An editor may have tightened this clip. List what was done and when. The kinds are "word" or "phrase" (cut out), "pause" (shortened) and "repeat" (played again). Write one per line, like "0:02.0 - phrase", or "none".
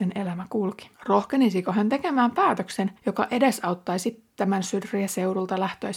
0:00.9 - pause
0:03.0 - pause